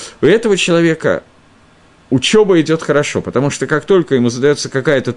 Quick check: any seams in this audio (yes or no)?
no